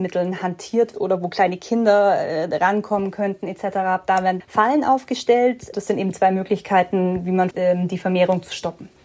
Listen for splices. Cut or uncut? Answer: cut